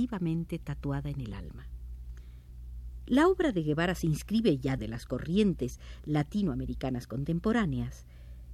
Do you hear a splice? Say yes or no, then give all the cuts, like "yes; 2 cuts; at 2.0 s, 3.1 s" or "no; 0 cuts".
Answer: yes; 1 cut; at 4.8 s